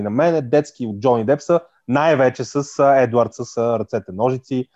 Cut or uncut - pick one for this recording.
uncut